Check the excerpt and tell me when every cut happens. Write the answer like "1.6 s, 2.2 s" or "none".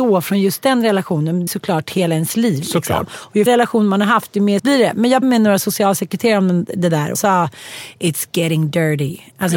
1.5 s, 3.5 s, 4.6 s, 5.2 s, 7.1 s